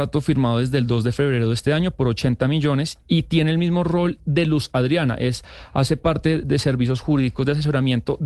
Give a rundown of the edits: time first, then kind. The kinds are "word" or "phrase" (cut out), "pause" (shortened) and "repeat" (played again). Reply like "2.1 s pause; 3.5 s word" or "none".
none